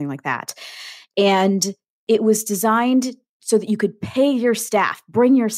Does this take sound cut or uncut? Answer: uncut